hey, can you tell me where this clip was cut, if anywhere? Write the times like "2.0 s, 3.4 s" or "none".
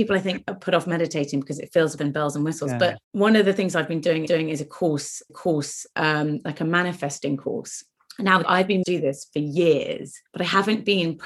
2.0 s, 3.0 s, 4.3 s, 5.3 s, 8.4 s, 8.8 s, 10.3 s

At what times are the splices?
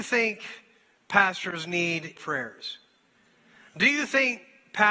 2.2 s

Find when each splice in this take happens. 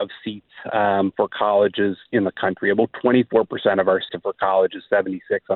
4.1 s

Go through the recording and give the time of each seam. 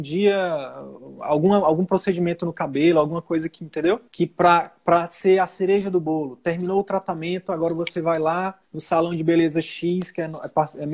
4.1 s, 8.6 s

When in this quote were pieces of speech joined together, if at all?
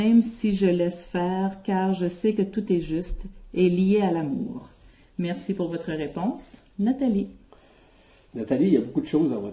none

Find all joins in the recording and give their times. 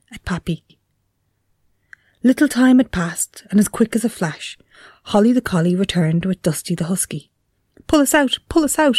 none

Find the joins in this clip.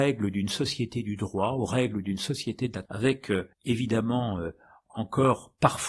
2.9 s, 3.5 s

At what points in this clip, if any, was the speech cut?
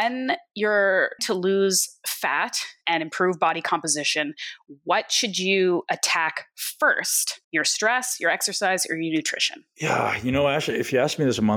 1.2 s, 7.4 s

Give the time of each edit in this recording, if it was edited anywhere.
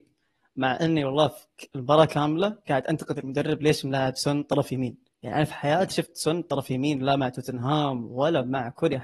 5.1 s, 5.9 s

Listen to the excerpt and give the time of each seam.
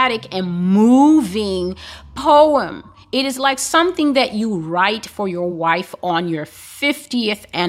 none

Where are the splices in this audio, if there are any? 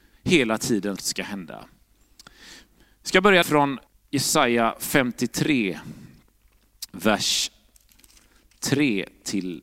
1.0 s, 3.4 s, 3.9 s

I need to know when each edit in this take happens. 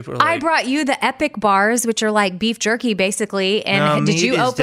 none

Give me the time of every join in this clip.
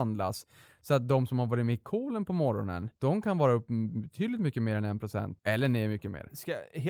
3.0 s, 5.4 s

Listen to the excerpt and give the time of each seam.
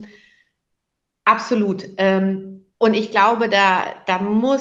2.7 s

